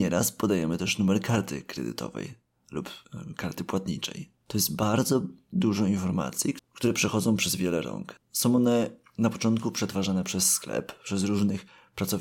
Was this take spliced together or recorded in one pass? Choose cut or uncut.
uncut